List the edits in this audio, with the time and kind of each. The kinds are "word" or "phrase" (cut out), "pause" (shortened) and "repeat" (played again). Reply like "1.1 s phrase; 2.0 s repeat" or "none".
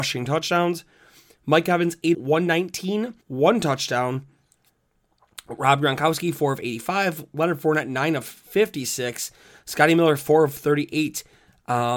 2.1 s word; 3.2 s pause